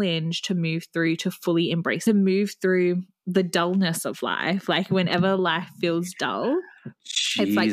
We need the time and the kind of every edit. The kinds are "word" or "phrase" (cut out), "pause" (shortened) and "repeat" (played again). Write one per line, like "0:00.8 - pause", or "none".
0:02.1 - phrase